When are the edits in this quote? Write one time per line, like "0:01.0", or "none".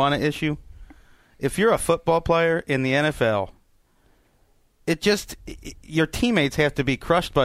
none